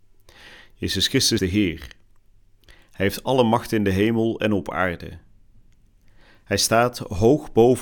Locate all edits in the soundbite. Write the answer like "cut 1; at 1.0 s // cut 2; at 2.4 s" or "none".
cut 1; at 1.4 s

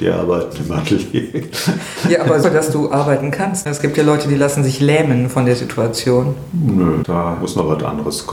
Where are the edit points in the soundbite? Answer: cut 1; at 2.4 s

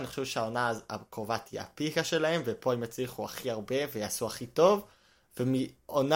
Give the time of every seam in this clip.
none

